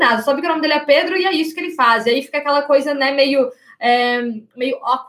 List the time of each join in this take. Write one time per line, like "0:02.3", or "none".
none